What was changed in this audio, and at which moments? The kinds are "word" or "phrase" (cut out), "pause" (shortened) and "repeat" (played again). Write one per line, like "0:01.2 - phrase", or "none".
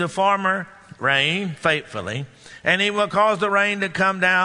none

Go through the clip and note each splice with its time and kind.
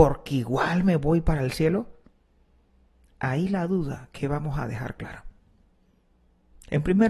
none

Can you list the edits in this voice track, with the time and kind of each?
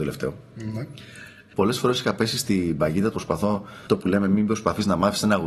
0:03.1 - word

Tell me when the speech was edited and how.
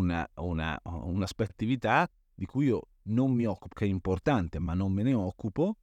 0:01.5 - phrase
0:03.7 - word

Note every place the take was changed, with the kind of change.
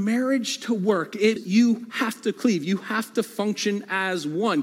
0:01.4 - word

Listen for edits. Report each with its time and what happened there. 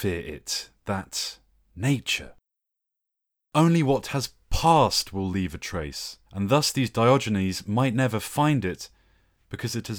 0:06.2 - pause

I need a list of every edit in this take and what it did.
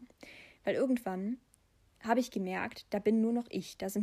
none

